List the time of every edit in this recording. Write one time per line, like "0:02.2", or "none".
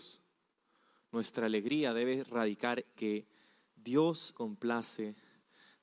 0:02.9
0:04.3

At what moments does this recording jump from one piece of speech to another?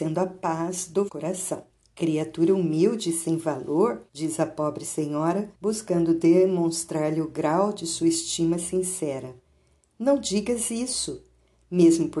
0:01.1
0:01.7
0:04.1
0:05.5

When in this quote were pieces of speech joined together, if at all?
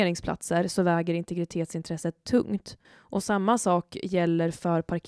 0:02.8

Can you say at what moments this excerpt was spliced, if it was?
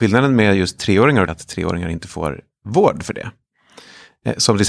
0:01.3

